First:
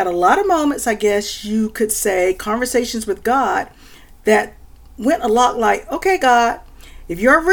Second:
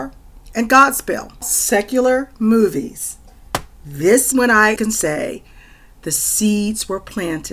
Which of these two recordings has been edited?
second; 3 cuts; at 1.4 s, 4.3 s, 4.8 s

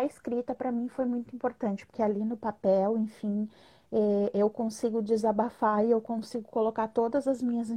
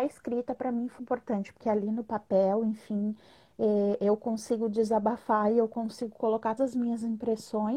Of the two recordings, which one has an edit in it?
second; 2 cuts; at 1.0 s, 6.6 s

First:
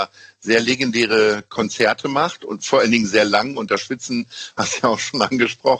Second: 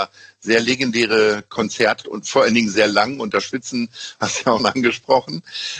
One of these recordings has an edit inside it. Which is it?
second; 2 cuts; at 2.0 s, 4.6 s

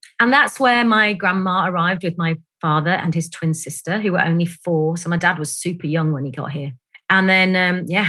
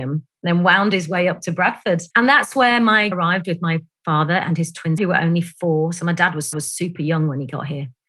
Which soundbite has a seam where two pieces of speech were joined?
second; 4 cuts; at 2.1 s, 3.1 s, 5.0 s, 6.5 s

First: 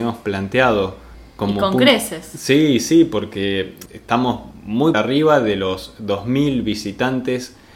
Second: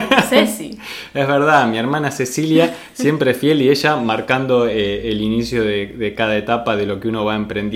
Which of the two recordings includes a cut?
first; 2 cuts; at 3.9 s, 4.9 s

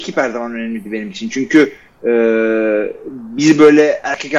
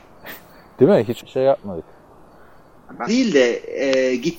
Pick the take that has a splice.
second; 2 cuts; at 1.2 s, 3.1 s

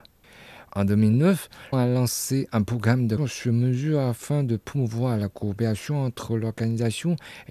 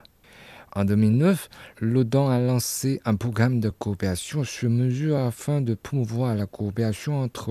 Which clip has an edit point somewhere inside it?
first; 2 cuts; at 1.7 s, 3.2 s

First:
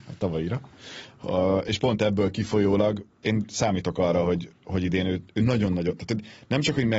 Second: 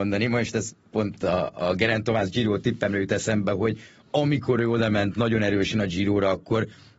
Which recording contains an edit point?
first; 1 cut; at 3.1 s

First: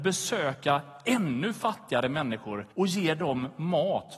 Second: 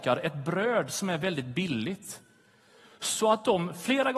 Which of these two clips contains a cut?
first; 1 cut; at 2.7 s

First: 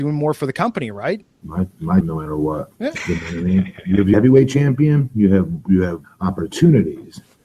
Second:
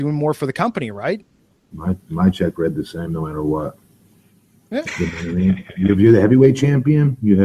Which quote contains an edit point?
first; 5 cuts; at 1.3 s, 2.0 s, 2.8 s, 4.1 s, 6.0 s

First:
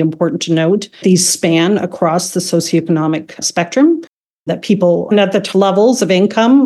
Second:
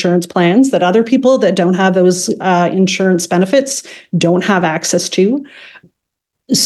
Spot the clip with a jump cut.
first; 4 cuts; at 1.0 s, 3.4 s, 5.1 s, 5.5 s

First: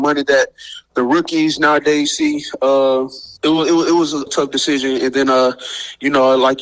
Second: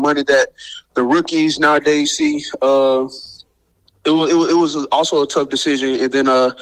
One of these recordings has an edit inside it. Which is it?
first; 2 cuts; at 3.4 s, 4.3 s

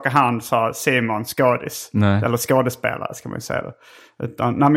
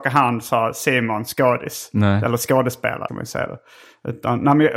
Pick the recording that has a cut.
second; 1 cut; at 3.1 s

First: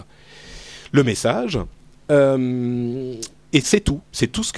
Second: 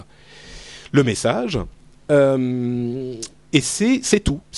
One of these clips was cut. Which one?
first; 1 cut; at 3.6 s

